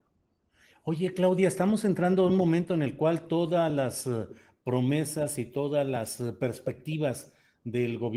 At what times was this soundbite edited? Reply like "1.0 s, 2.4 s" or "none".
none